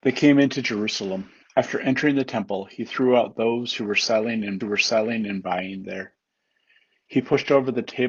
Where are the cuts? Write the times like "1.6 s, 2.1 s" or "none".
1.4 s, 4.6 s